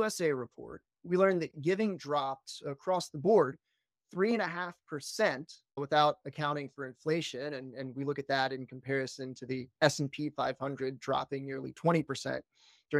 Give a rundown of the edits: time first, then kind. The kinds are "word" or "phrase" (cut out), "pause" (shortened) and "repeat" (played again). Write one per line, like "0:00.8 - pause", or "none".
none